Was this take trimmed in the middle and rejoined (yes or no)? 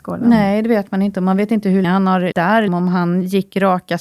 yes